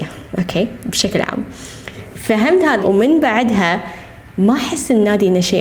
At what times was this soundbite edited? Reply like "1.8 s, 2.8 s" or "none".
2.8 s